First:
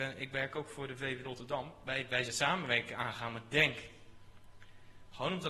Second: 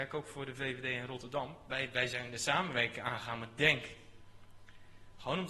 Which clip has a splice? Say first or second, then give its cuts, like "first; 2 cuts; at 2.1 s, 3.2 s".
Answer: first; 2 cuts; at 1.2 s, 2.2 s